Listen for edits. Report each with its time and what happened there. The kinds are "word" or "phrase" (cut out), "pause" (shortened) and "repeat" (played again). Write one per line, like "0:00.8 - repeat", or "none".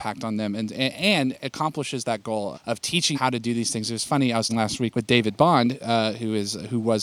0:02.5 - word
0:03.1 - word
0:04.5 - word
0:04.9 - word